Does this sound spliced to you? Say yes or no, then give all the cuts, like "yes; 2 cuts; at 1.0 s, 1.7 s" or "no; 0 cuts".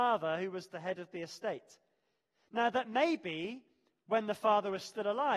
no; 0 cuts